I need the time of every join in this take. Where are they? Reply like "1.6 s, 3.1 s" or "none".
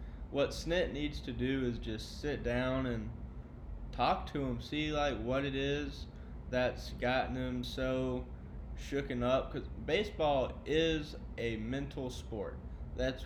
none